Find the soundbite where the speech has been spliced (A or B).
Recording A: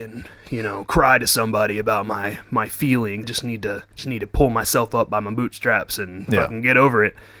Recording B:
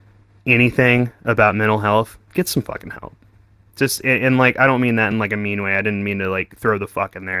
A